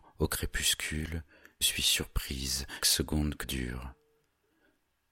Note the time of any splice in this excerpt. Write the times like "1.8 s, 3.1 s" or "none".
1.6 s, 2.8 s, 3.4 s

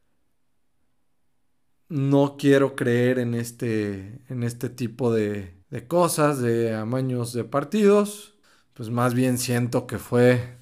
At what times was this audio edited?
5.6 s, 8.4 s

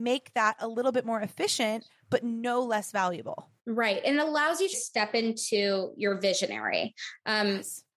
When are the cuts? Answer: 3.6 s, 4.7 s

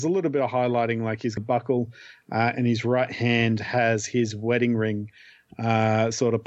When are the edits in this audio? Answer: 1.4 s

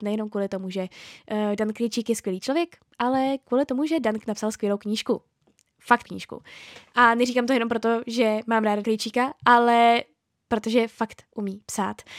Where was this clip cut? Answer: 4.2 s, 6.0 s, 8.8 s

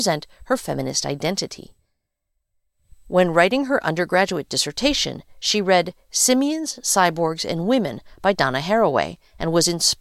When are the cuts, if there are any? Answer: none

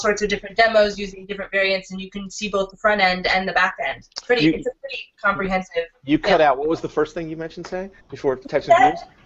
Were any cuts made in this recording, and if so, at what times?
8.0 s

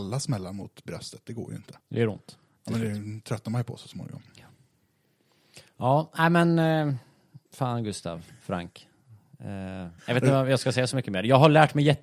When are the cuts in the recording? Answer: 1.8 s, 7.5 s, 10.0 s

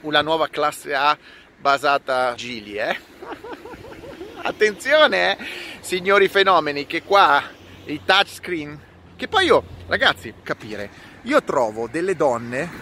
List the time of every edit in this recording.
2.4 s, 10.4 s

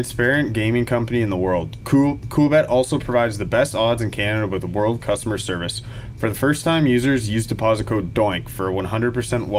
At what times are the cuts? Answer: 5.0 s

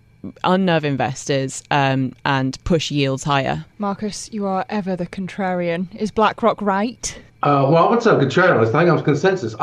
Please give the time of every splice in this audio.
3.7 s, 7.3 s

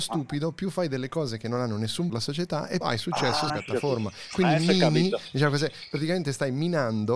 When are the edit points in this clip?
2.1 s, 2.8 s, 3.5 s

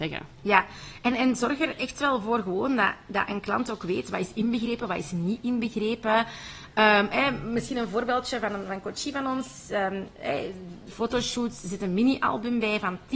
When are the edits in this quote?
none

